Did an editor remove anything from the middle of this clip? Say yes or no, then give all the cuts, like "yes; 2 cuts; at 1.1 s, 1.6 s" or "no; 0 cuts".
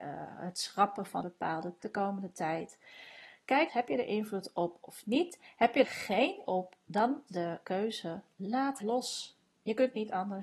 yes; 7 cuts; at 1.2 s, 1.8 s, 3.7 s, 5.8 s, 6.4 s, 7.3 s, 8.8 s